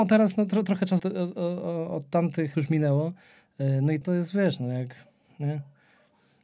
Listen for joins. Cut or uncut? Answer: cut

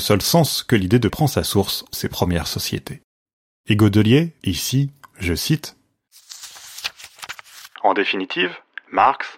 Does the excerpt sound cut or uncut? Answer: cut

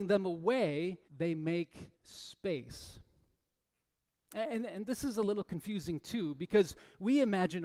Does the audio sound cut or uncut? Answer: cut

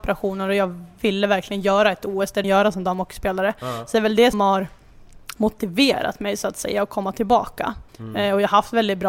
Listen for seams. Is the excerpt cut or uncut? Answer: cut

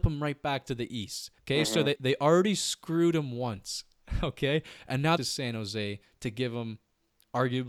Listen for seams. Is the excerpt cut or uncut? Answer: cut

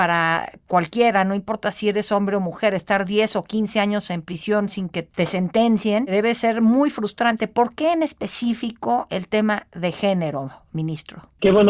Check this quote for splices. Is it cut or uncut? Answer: uncut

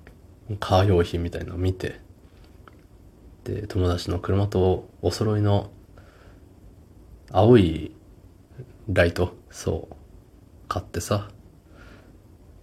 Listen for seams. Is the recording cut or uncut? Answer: cut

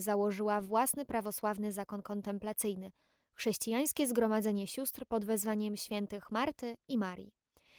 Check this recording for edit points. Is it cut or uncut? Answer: uncut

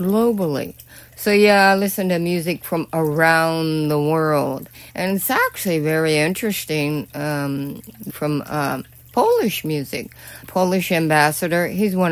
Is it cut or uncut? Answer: cut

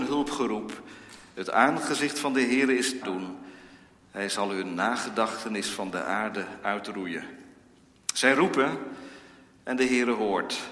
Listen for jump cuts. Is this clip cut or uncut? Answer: cut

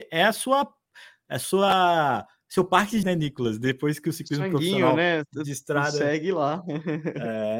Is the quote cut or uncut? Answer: cut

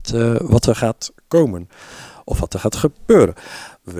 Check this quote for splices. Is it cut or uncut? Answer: cut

